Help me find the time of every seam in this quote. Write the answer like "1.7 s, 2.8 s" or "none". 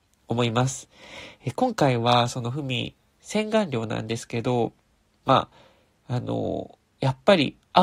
none